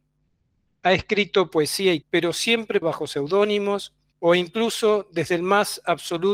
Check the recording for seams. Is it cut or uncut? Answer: cut